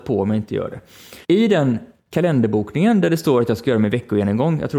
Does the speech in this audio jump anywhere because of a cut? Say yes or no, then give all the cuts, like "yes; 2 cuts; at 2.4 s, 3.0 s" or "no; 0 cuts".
yes; 1 cut; at 1.2 s